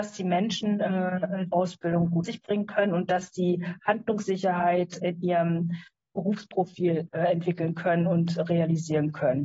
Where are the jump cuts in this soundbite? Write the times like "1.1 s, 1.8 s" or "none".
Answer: 1.5 s, 2.2 s, 5.0 s, 7.1 s